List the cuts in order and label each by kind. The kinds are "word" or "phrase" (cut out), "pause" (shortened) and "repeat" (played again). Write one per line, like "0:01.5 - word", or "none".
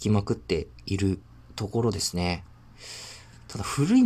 0:01.3 - pause

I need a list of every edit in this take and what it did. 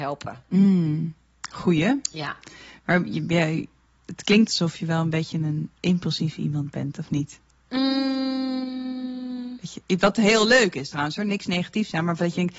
none

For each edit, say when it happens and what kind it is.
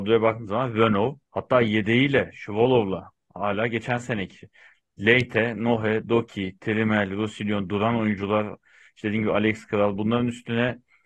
0:01.2 - pause

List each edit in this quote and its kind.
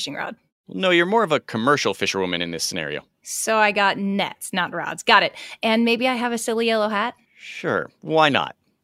0:07.2 - pause

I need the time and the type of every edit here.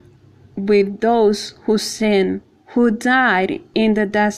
none

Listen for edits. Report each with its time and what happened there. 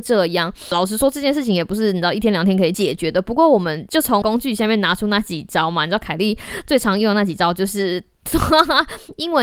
none

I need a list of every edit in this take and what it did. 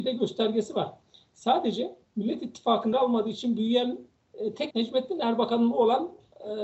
0:02.1 - pause
0:02.9 - word
0:04.2 - word
0:04.7 - word
0:05.7 - word

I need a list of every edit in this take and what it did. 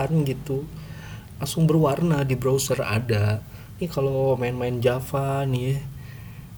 none

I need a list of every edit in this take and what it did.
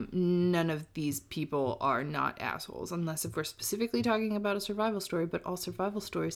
none

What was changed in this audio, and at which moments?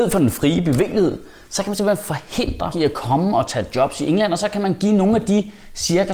0:02.7 - word

